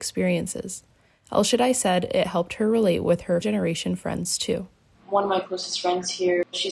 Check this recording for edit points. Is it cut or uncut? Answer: cut